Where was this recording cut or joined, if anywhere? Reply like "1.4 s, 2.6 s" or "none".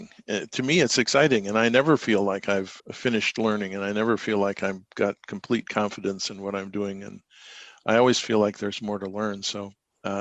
2.8 s